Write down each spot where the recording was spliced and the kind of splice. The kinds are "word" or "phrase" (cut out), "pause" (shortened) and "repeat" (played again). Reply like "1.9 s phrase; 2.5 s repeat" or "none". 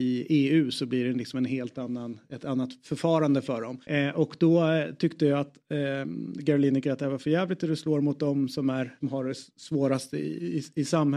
3.8 s pause; 9.0 s phrase